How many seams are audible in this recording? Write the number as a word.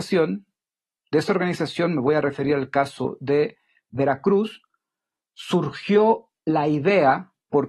zero